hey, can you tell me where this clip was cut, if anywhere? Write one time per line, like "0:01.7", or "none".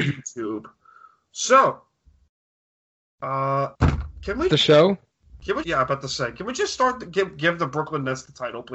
0:03.7
0:04.5
0:05.6